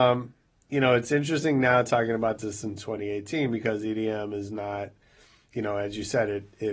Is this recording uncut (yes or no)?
yes